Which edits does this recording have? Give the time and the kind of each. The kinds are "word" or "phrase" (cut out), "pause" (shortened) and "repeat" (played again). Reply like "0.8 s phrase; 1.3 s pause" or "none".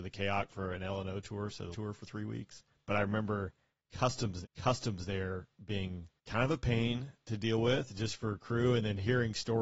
1.7 s word; 2.7 s pause; 4.4 s repeat; 6.2 s pause